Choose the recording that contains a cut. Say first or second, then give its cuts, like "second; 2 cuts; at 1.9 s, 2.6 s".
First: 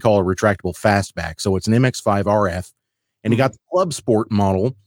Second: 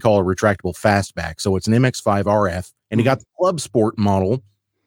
second; 1 cut; at 2.8 s